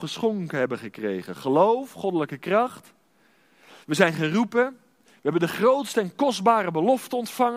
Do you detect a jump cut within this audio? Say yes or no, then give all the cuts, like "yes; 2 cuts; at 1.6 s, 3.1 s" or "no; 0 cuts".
no; 0 cuts